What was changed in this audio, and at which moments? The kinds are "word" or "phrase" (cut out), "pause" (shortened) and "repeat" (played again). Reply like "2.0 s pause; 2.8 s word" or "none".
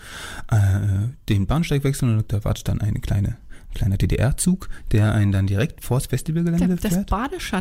2.3 s word